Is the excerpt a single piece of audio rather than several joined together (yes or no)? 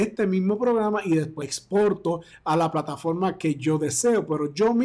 no